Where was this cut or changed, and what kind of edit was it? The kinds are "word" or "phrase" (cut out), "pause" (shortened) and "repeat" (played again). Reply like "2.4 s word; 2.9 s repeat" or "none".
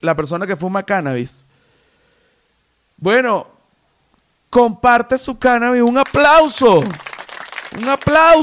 none